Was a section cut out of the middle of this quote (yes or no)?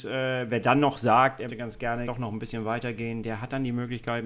yes